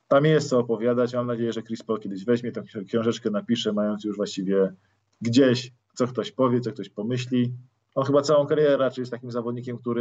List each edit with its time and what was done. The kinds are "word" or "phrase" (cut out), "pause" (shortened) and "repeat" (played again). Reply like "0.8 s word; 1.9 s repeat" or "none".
none